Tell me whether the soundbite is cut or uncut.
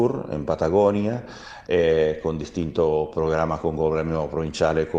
uncut